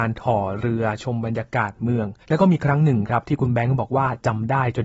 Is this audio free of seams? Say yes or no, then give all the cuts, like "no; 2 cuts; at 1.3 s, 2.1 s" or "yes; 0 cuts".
no; 1 cut; at 2.2 s